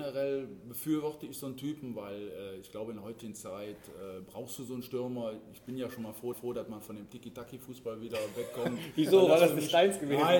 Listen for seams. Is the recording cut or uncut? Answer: cut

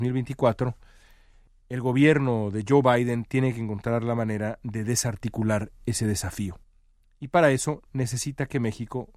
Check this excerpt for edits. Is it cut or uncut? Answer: uncut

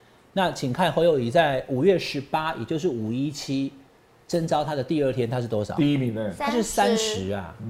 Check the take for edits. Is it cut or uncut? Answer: uncut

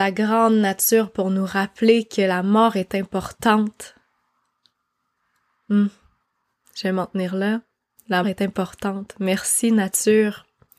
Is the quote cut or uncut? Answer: cut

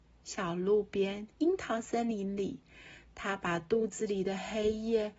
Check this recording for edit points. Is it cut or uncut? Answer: cut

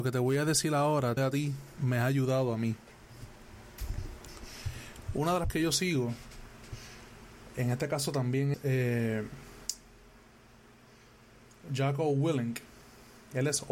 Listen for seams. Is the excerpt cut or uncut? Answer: cut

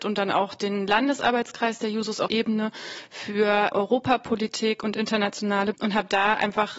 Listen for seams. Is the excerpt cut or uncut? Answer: cut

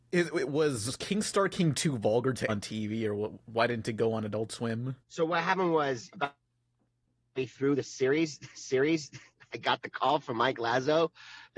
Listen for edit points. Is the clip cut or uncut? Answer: cut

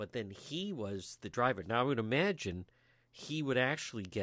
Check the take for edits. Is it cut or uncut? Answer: uncut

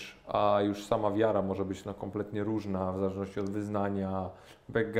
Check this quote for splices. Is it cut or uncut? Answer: uncut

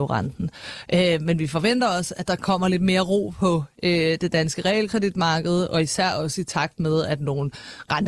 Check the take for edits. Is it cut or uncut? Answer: uncut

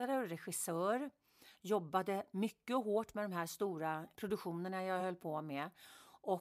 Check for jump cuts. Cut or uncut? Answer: uncut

